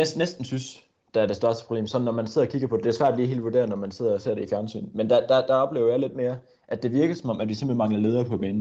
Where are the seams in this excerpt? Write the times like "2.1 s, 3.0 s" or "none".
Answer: none